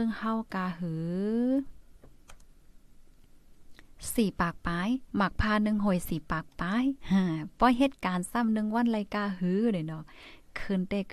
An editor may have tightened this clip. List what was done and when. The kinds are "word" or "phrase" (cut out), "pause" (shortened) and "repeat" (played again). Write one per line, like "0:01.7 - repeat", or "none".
0:05.1 - pause
0:07.0 - pause